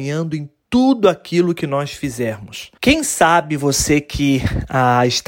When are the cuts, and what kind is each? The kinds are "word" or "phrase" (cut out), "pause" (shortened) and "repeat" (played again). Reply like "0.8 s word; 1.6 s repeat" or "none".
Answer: 2.8 s pause